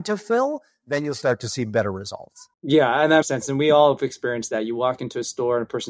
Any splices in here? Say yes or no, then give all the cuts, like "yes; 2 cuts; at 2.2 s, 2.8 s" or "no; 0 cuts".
yes; 2 cuts; at 2.5 s, 3.2 s